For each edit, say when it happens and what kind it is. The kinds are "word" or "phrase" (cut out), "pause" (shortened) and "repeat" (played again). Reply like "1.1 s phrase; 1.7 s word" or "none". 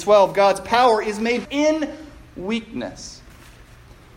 1.4 s word